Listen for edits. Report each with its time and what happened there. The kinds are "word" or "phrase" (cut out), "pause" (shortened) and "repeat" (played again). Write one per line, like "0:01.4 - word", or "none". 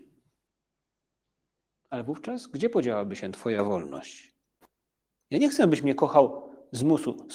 none